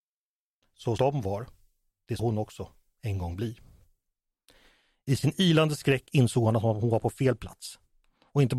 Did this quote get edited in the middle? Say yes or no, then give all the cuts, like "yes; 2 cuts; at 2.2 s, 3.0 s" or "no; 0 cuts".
yes; 2 cuts; at 1.0 s, 2.2 s